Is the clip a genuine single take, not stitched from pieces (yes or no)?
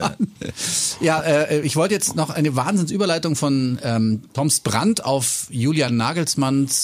yes